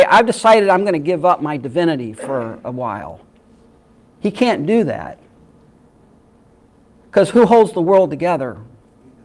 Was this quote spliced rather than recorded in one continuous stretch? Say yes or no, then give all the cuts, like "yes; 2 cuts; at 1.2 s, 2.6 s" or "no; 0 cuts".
no; 0 cuts